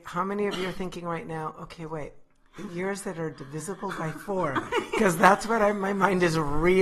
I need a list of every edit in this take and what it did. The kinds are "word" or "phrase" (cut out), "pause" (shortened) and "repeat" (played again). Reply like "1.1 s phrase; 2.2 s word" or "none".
none

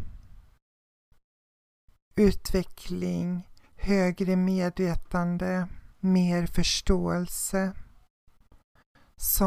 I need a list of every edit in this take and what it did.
3.6 s pause; 5.9 s pause

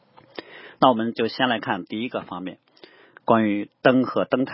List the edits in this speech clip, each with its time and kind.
none

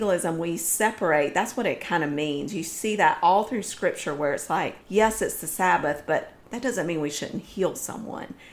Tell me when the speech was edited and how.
4.8 s pause

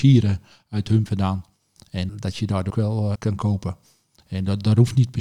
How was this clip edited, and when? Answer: 1.1 s word; 2.1 s word; 2.7 s word; 3.1 s word

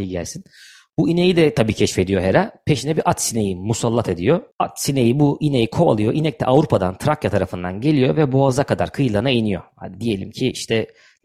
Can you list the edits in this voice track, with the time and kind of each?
4.5 s pause

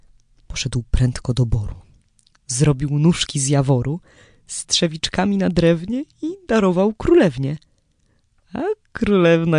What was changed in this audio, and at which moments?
none

